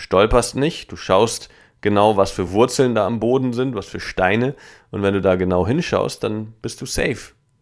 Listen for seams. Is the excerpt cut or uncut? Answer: uncut